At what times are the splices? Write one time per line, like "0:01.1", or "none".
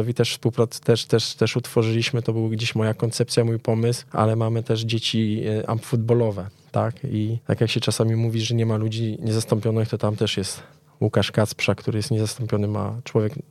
none

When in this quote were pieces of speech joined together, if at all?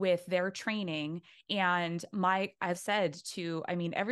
0:02.8

